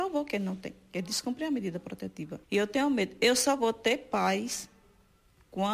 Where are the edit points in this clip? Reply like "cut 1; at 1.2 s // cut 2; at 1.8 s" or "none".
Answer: cut 1; at 2.4 s